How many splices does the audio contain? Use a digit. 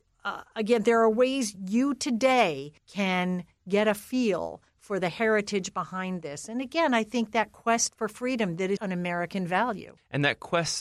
2